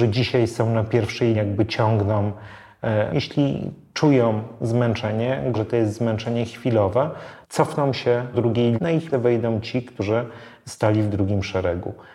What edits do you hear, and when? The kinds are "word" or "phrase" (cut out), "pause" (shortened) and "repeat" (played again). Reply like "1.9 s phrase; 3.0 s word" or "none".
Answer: 1.3 s word; 3.1 s word; 5.5 s word; 7.4 s word; 8.3 s word; 8.8 s word; 9.1 s word